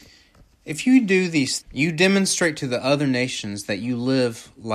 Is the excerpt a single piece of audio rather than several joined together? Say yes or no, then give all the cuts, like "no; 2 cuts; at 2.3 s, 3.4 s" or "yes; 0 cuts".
no; 1 cut; at 1.6 s